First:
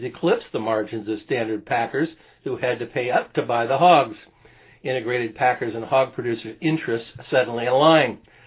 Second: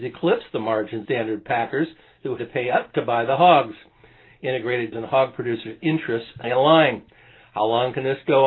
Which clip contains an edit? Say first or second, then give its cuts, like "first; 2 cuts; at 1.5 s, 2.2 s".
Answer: second; 4 cuts; at 1.1 s, 2.4 s, 4.9 s, 6.4 s